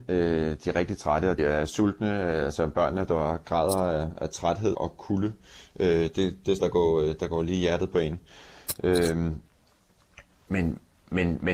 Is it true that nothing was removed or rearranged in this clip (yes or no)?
no